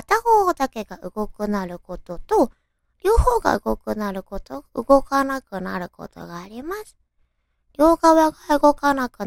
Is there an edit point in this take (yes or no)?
no